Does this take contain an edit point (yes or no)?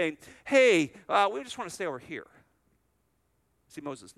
no